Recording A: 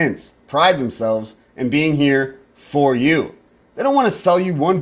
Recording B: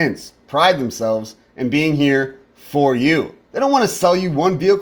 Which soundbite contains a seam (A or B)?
B